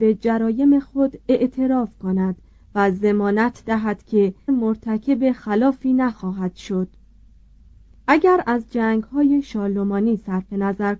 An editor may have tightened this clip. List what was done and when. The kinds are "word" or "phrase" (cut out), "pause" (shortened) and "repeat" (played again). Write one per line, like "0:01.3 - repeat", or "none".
0:04.5 - word